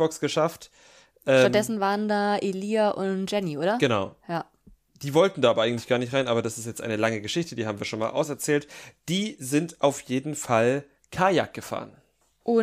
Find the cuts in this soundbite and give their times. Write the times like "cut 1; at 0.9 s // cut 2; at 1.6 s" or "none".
none